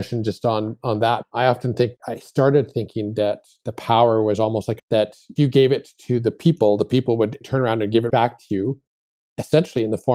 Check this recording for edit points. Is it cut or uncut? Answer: cut